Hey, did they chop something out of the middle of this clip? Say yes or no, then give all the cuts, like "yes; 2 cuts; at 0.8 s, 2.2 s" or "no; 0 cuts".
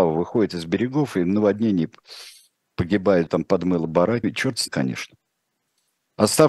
yes; 3 cuts; at 3.3 s, 4.2 s, 4.7 s